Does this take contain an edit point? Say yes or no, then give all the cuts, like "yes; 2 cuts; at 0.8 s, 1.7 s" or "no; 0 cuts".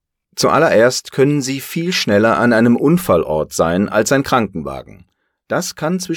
no; 0 cuts